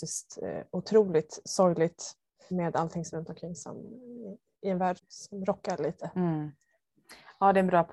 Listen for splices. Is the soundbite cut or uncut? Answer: cut